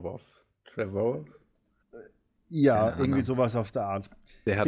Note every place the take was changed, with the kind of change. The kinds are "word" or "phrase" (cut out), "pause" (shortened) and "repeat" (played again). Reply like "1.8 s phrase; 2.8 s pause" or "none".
none